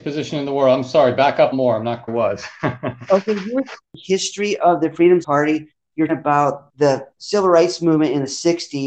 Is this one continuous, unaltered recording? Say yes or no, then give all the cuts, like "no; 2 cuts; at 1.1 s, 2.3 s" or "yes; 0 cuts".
no; 6 cuts; at 1.5 s, 2.1 s, 3.8 s, 5.2 s, 6.1 s, 6.7 s